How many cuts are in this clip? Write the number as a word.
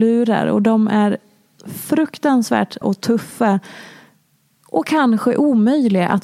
one